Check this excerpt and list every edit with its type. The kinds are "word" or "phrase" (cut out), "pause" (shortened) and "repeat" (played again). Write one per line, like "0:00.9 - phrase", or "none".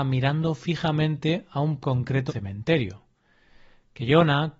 0:01.8 - word
0:02.3 - word